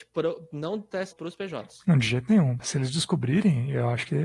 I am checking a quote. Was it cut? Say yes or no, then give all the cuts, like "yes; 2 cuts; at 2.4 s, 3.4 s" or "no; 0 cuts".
yes; 1 cut; at 1.1 s